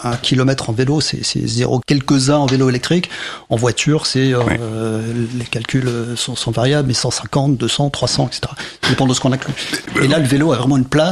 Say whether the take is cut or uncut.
cut